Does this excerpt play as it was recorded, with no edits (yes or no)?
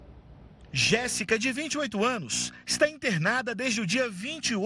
yes